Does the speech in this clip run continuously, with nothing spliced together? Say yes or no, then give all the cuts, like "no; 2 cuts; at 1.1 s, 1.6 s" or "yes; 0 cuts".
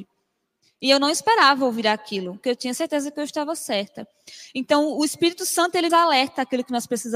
no; 2 cuts; at 2.4 s, 5.9 s